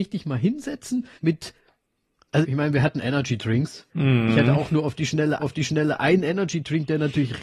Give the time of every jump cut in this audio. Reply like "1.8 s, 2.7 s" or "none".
1.2 s, 2.4 s, 3.9 s, 5.4 s